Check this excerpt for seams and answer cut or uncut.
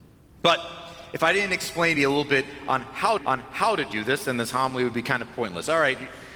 cut